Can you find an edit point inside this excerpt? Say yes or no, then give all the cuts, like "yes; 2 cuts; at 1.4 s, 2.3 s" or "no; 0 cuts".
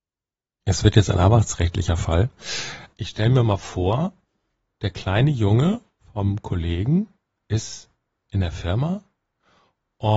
no; 0 cuts